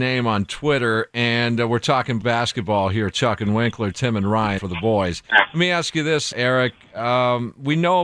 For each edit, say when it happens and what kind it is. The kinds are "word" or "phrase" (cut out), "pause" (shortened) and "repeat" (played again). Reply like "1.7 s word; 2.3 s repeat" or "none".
2.2 s word; 4.6 s word; 5.3 s pause; 6.3 s word